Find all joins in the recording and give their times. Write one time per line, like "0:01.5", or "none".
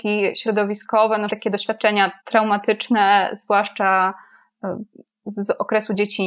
0:01.3
0:02.2